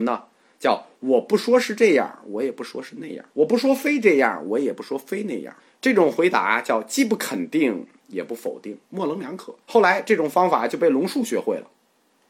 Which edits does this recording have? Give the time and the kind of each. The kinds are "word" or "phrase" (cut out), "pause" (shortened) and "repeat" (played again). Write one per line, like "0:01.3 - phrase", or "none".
0:03.3 - pause
0:05.6 - pause
0:08.9 - pause
0:09.6 - pause